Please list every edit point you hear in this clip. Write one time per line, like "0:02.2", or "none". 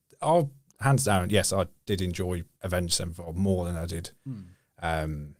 0:02.5
0:04.1